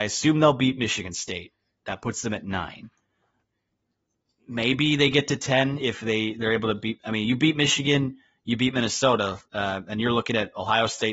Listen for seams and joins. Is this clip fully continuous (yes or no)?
yes